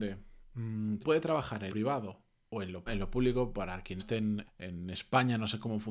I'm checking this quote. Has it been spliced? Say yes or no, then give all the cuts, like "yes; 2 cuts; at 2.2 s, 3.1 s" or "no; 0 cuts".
yes; 5 cuts; at 1.0 s, 1.7 s, 2.9 s, 4.0 s, 4.4 s